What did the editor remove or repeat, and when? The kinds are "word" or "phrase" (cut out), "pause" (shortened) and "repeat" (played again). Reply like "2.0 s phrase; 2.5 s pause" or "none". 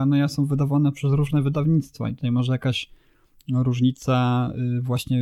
none